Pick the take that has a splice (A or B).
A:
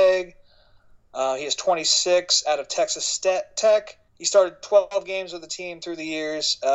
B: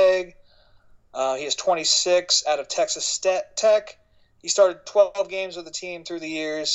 A